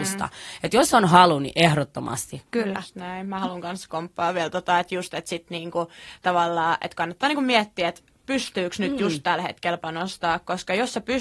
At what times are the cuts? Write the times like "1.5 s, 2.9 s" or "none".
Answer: 2.5 s